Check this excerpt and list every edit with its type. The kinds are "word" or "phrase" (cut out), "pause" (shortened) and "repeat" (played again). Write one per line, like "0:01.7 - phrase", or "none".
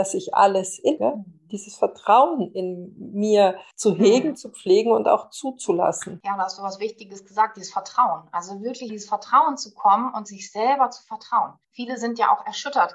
0:01.0 - phrase
0:03.7 - pause
0:08.9 - phrase
0:11.6 - pause